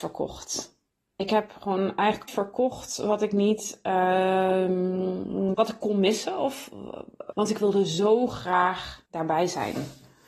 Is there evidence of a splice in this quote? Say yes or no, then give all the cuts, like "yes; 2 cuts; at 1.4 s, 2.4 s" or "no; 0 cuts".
yes; 4 cuts; at 2.3 s, 5.5 s, 7.3 s, 9.1 s